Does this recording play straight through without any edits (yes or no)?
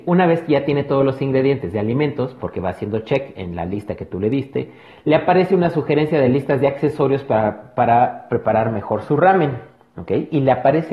yes